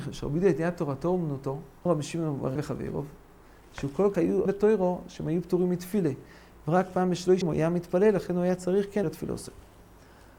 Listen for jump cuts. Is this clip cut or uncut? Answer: cut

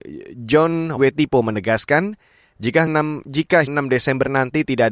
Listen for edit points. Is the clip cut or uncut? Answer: cut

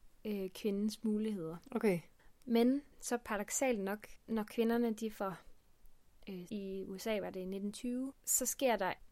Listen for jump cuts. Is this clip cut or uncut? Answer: cut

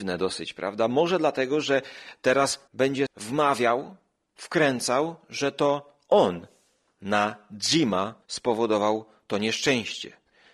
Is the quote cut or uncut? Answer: cut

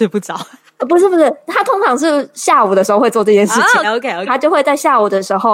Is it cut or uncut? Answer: cut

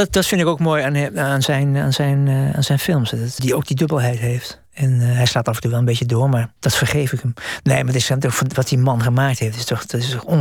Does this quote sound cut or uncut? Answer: cut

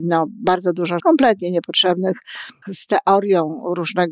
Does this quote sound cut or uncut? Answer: cut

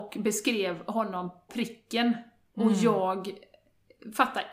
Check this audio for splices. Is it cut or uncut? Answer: cut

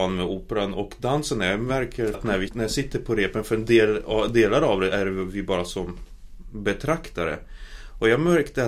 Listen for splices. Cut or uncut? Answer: cut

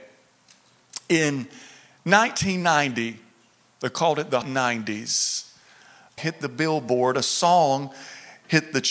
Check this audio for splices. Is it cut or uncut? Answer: cut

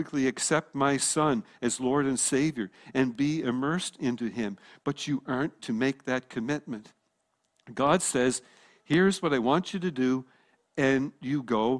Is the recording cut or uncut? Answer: cut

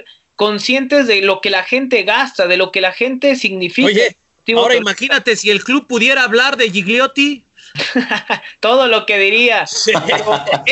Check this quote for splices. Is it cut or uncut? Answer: uncut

